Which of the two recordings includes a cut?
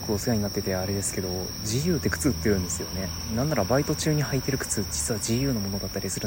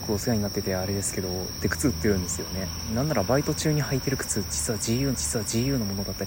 second; 2 cuts; at 1.6 s, 5.1 s

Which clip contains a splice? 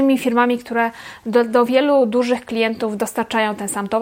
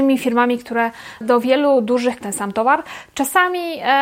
second; 2 cuts; at 1.2 s, 2.2 s

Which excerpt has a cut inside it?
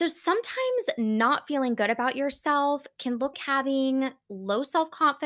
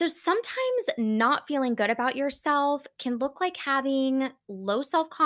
first; 1 cut; at 3.3 s

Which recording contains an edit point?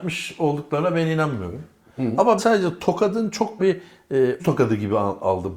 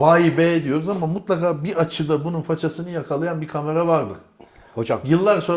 first; 3 cuts; at 2.4 s, 3.6 s, 4.4 s

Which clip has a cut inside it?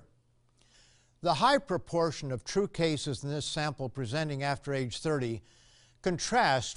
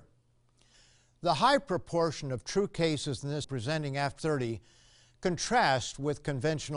second; 2 cuts; at 3.4 s, 4.2 s

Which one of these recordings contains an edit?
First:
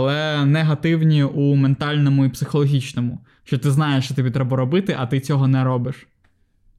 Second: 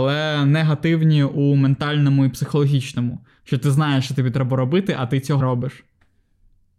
second; 1 cut; at 5.4 s

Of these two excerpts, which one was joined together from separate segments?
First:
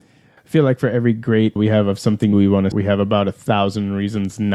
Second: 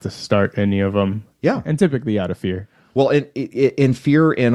first; 3 cuts; at 1.6 s, 2.3 s, 2.7 s

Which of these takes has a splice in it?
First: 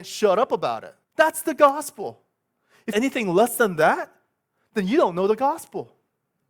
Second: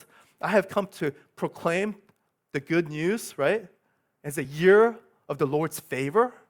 first; 2 cuts; at 1.0 s, 2.9 s

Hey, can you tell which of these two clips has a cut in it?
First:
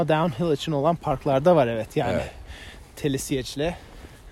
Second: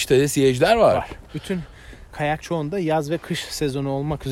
second; 1 cut; at 2.4 s

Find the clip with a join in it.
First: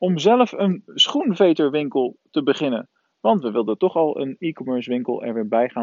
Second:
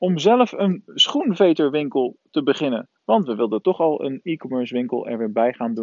second; 1 cut; at 3.0 s

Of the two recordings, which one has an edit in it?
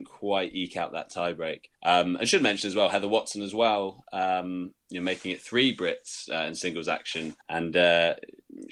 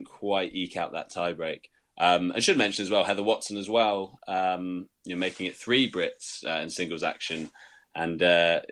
first; 2 cuts; at 1.7 s, 7.4 s

